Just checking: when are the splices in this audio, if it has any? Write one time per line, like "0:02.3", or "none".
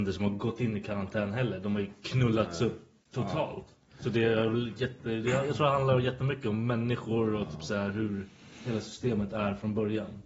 none

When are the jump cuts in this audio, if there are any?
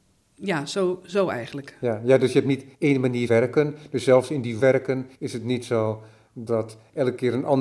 0:02.7
0:03.3
0:04.6
0:05.1
0:06.5

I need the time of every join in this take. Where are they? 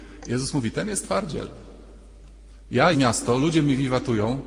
0:02.9

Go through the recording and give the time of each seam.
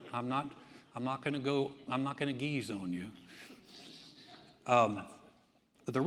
none

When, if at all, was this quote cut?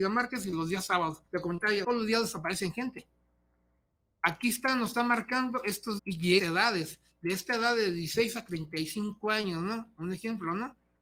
0:01.3
0:01.8
0:06.0
0:06.4

